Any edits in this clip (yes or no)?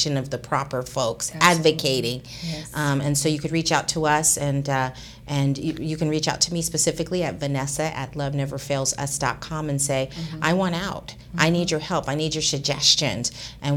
no